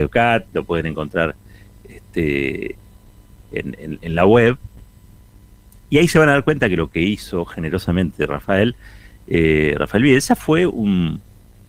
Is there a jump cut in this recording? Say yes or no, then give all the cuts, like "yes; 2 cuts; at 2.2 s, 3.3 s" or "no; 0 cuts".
no; 0 cuts